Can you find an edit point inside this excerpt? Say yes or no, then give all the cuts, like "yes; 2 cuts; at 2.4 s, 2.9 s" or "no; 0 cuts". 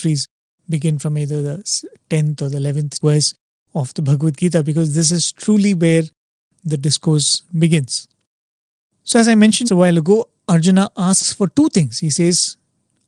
yes; 1 cut; at 9.6 s